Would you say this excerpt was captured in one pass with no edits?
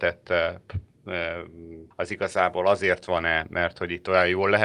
no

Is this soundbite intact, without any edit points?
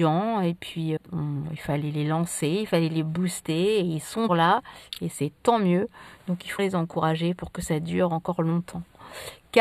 no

